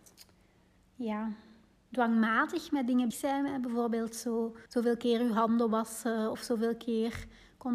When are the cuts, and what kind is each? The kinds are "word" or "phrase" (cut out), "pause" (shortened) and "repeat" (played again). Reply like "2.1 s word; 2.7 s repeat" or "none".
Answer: 1.8 s pause; 3.1 s word; 4.7 s pause